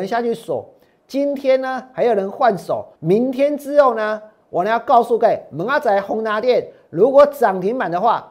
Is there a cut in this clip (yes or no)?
yes